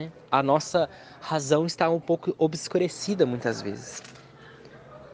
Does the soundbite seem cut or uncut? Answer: uncut